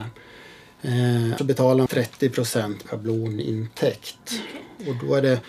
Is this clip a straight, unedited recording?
no; 3 cuts; at 1.4 s, 1.9 s, 2.8 s

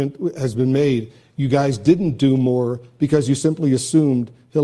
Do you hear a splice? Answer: no; 0 cuts

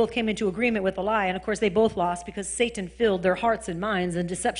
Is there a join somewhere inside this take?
no; 0 cuts

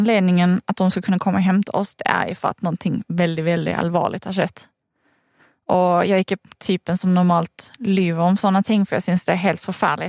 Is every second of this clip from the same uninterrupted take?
yes; 0 cuts

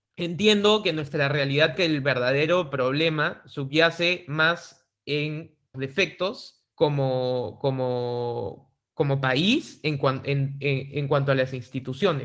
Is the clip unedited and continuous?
no; 3 cuts; at 1.8 s, 5.7 s, 6.7 s

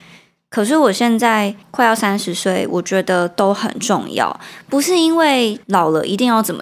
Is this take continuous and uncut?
no; 2 cuts; at 1.6 s, 5.6 s

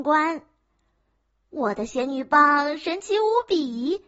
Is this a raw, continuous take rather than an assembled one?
yes; 0 cuts

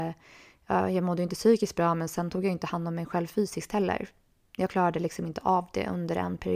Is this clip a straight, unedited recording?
yes; 0 cuts

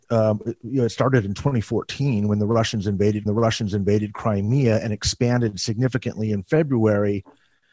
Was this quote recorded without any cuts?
no; 1 cut; at 3.3 s

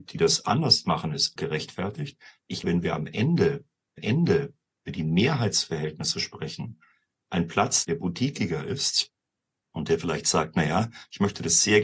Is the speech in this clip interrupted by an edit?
yes; 4 cuts; at 1.4 s, 2.6 s, 4.0 s, 7.8 s

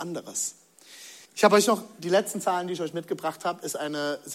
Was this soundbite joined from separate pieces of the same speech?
yes; 1 cut; at 1.2 s

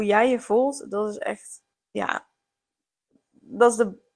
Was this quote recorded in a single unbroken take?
no; 1 cut; at 1.7 s

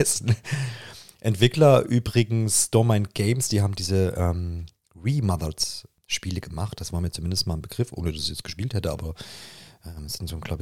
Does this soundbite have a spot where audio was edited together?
no; 0 cuts

